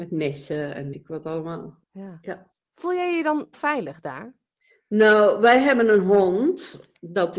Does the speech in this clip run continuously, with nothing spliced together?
no; 3 cuts; at 0.9 s, 1.8 s, 3.5 s

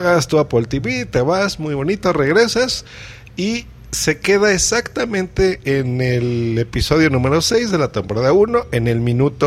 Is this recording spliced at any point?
no; 0 cuts

